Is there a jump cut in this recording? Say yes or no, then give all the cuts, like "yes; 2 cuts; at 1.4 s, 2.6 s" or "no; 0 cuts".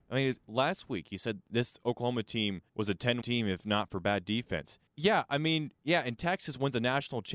yes; 3 cuts; at 2.7 s, 3.2 s, 4.9 s